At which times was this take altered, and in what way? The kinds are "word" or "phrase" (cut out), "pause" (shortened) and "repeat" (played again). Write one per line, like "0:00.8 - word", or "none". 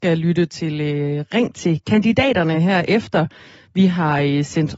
none